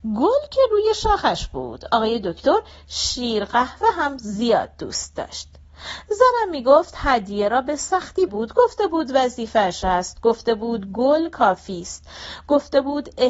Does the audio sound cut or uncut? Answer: cut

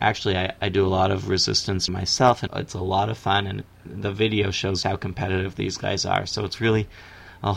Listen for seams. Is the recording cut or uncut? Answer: cut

